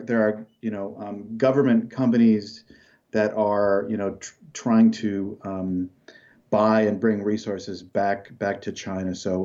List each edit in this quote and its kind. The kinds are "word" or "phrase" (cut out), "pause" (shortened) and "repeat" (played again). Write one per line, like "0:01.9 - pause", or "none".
none